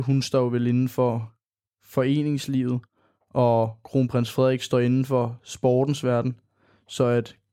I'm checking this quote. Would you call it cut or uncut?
uncut